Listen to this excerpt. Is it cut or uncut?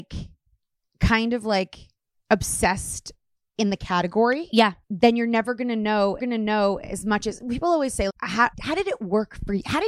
cut